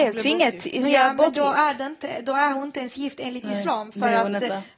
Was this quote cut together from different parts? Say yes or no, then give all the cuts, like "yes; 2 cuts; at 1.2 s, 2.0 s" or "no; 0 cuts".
no; 0 cuts